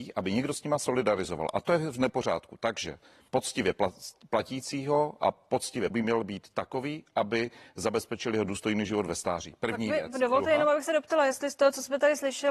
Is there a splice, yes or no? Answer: yes